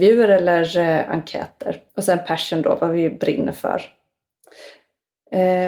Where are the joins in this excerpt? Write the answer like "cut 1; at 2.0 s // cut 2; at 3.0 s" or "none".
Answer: cut 1; at 1.9 s